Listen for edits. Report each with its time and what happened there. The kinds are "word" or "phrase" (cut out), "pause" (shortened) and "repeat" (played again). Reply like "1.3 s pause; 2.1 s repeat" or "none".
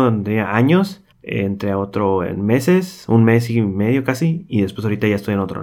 1.1 s pause